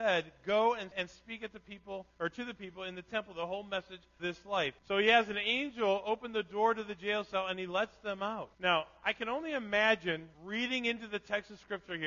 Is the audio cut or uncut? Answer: cut